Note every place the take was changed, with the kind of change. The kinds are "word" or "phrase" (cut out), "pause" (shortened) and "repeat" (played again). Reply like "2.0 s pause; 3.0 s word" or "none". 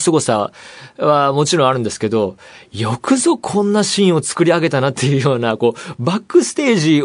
none

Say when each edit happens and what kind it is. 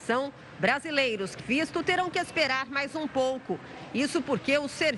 1.4 s phrase

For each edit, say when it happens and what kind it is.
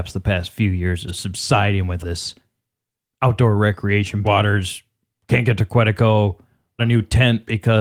1.1 s word; 2.0 s word; 4.2 s word; 6.8 s word

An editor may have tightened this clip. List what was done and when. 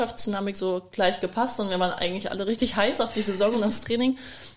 none

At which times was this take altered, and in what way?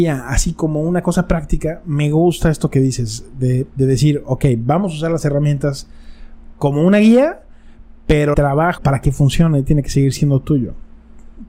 8.3 s word; 8.8 s phrase

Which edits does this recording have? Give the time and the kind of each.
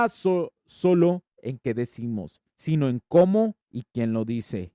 2.5 s pause

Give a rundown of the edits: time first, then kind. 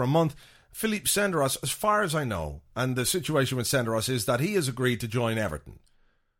none

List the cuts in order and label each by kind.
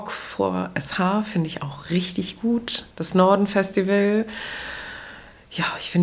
2.9 s pause

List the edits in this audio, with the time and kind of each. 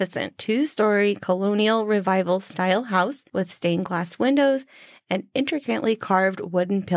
none

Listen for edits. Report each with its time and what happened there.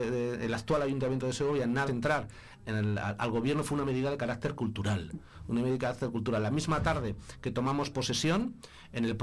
1.9 s word

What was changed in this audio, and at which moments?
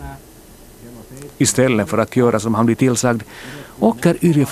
none

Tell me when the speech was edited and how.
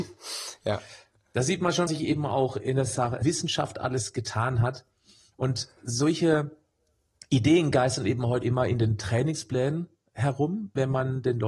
1.9 s word; 3.2 s word; 8.4 s word

